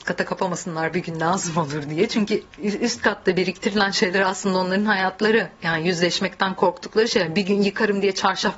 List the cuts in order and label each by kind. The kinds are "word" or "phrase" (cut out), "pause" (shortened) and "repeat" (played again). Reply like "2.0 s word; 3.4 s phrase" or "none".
2.5 s pause